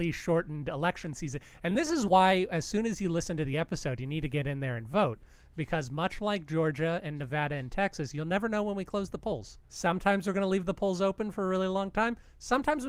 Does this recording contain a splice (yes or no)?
no